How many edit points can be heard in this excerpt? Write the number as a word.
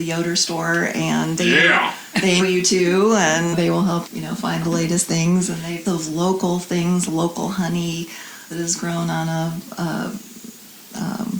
seven